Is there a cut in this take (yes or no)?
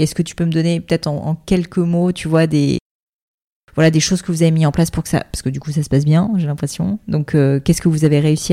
no